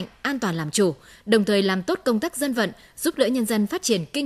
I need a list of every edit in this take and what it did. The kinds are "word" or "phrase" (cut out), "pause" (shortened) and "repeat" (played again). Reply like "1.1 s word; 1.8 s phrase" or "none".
none

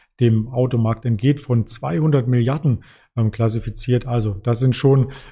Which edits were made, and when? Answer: none

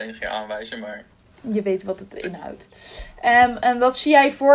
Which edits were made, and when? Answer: none

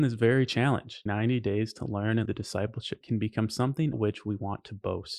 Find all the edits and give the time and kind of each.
1.1 s word; 2.3 s word; 3.0 s word; 3.9 s word

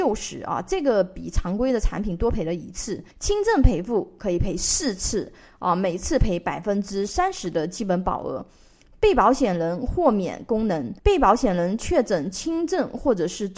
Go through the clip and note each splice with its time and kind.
3.1 s pause; 11.0 s pause

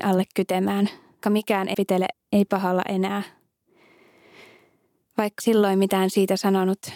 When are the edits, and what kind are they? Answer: 1.2 s word; 1.7 s word; 2.1 s word; 5.4 s word

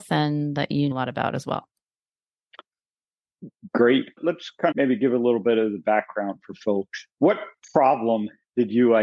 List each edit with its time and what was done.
0.9 s word; 4.7 s word

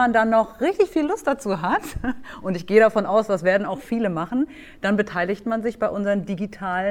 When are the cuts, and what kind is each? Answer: none

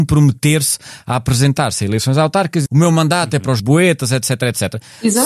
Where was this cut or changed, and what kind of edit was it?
2.7 s word; 3.6 s word

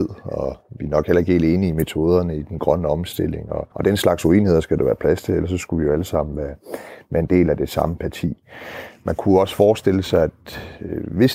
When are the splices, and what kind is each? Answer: 3.7 s pause

